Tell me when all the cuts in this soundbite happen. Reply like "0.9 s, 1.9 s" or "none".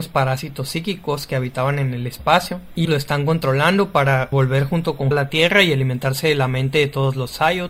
2.8 s, 5.1 s